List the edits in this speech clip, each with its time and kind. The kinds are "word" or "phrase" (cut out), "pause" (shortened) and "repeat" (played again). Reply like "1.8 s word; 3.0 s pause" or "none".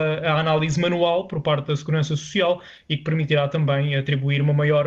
none